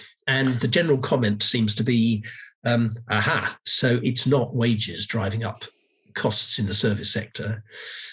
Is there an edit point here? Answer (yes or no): no